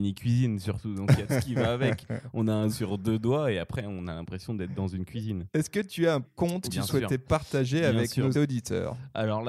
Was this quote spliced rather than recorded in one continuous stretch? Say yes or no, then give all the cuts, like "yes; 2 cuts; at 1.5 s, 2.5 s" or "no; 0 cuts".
yes; 5 cuts; at 1.3 s, 2.7 s, 6.2 s, 6.7 s, 8.3 s